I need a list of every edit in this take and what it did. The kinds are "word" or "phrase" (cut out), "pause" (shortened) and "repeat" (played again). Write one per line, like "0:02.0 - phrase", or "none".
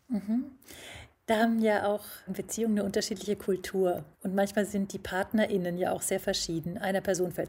0:02.3 - word
0:04.1 - pause

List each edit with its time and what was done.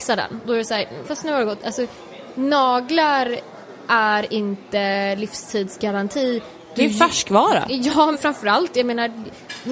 0:01.0 - word
0:08.1 - word

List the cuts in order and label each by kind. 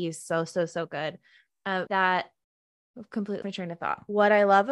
0:01.9 - word
0:03.4 - word

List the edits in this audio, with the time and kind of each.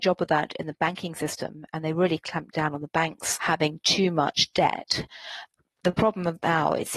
none

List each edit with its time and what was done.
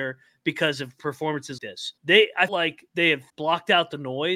0:01.6 - word
0:02.0 - pause
0:02.5 - word
0:02.9 - pause
0:03.3 - word

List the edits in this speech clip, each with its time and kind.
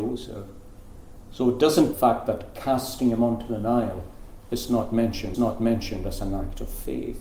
0:01.9 - phrase
0:05.3 - repeat

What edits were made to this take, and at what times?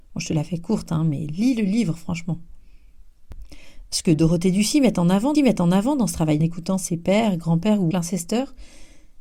0:05.3 - repeat
0:06.4 - phrase
0:07.9 - word

